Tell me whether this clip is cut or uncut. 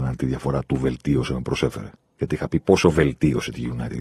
uncut